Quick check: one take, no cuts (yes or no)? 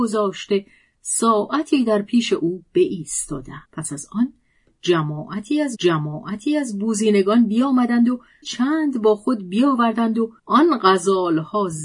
no